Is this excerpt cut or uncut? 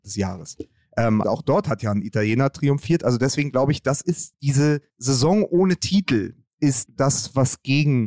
cut